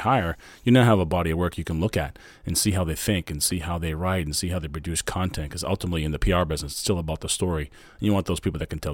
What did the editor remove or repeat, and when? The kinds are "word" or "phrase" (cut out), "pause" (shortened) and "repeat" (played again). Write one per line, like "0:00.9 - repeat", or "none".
none